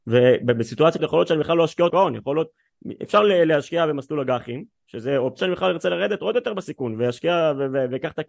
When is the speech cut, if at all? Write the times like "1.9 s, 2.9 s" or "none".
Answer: 1.0 s, 1.9 s, 5.4 s